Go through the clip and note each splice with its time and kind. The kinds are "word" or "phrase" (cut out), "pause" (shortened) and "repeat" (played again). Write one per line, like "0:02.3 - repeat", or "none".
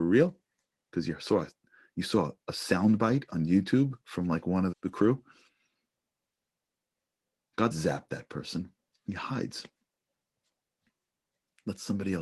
0:04.0 - pause
0:04.7 - word
0:07.7 - word
0:08.9 - pause